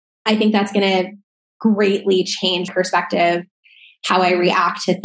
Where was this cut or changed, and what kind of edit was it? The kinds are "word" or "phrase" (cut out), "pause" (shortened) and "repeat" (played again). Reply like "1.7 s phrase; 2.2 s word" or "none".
2.7 s word